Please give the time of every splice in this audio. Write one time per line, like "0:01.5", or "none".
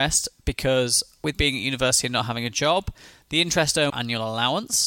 0:01.3
0:03.9